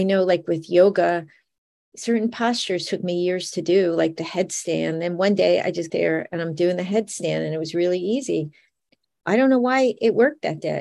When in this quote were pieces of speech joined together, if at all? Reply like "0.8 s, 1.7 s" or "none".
5.9 s